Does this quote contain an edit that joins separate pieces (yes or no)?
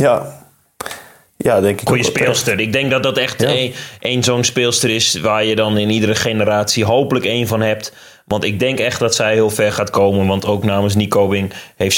no